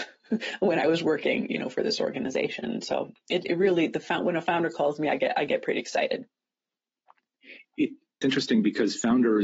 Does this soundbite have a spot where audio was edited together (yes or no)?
yes